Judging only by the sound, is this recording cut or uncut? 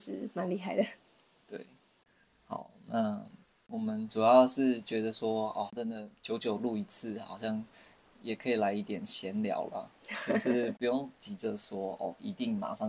uncut